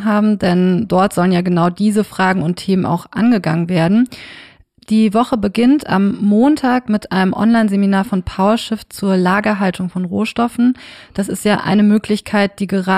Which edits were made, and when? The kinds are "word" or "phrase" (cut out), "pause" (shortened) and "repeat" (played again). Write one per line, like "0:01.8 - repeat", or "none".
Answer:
none